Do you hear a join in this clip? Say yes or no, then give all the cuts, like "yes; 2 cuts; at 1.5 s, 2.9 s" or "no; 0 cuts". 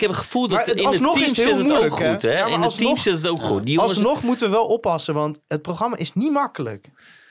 no; 0 cuts